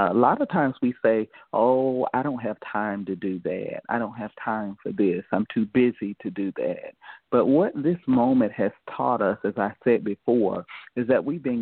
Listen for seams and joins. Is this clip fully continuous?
yes; 0 cuts

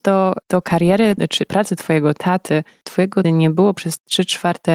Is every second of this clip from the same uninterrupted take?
no; 3 cuts; at 1.5 s, 2.8 s, 3.2 s

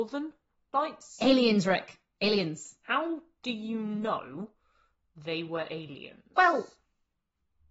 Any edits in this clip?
no; 0 cuts

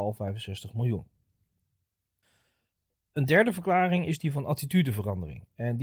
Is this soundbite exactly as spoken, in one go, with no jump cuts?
yes; 0 cuts

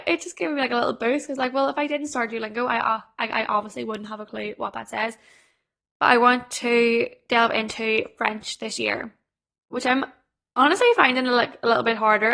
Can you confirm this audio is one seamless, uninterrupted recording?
yes; 0 cuts

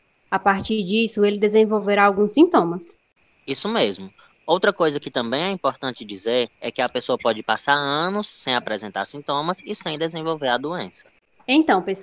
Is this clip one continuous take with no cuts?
yes; 0 cuts

